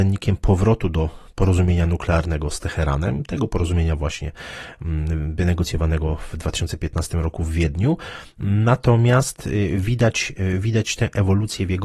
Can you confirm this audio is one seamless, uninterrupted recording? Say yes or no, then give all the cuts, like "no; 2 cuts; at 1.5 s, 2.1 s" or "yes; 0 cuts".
yes; 0 cuts